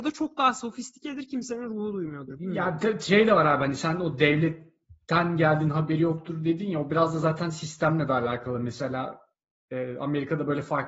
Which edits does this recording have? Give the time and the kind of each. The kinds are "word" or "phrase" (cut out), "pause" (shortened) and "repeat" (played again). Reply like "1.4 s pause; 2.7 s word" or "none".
5.0 s pause

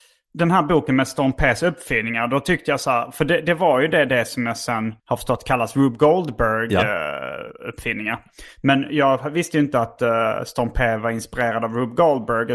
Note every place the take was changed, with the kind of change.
5.0 s pause

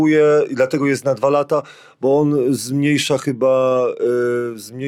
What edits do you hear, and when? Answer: none

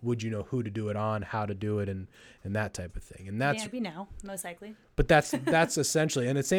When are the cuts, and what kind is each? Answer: 3.6 s phrase

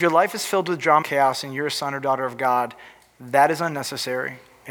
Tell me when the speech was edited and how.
1.0 s word

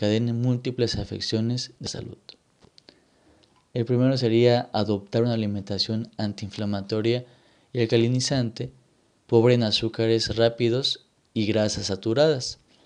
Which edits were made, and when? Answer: 1.8 s word

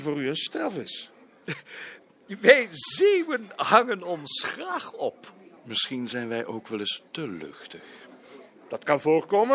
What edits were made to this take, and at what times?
5.6 s pause

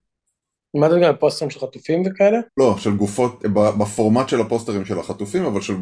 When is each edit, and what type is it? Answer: 2.5 s pause; 3.4 s word

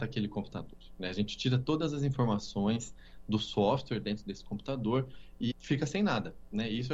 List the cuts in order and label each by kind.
5.5 s word

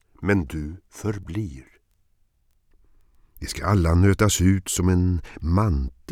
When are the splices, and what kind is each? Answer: none

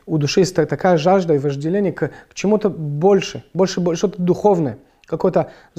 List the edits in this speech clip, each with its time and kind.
none

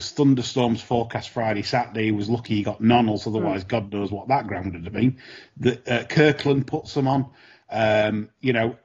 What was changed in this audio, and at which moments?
none

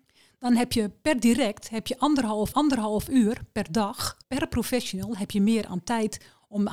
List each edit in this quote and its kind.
2.5 s repeat; 4.2 s pause

